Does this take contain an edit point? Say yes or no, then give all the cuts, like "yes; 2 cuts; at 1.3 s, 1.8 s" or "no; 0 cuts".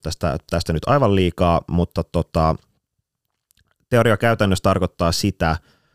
no; 0 cuts